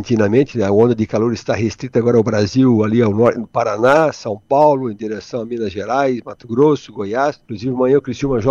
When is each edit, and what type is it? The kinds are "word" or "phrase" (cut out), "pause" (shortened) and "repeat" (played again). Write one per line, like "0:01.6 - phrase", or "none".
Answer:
0:07.4 - pause